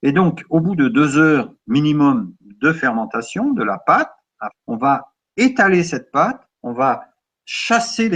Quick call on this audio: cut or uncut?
cut